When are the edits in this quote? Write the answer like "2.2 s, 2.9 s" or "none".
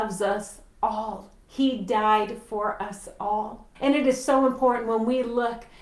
3.7 s